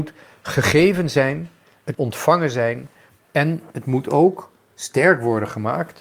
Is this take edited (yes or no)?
yes